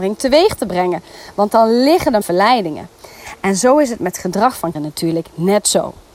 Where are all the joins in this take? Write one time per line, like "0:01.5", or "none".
0:02.2
0:04.7